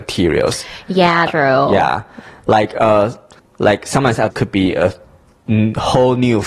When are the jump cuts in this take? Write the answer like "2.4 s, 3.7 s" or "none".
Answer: 1.3 s, 3.4 s, 4.3 s